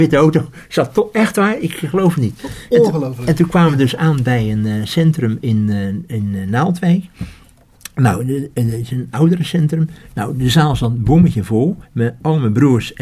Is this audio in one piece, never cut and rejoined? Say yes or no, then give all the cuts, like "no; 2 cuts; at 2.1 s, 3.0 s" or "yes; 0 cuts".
no; 1 cut; at 11.8 s